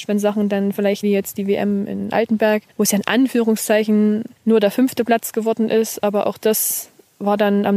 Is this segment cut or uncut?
cut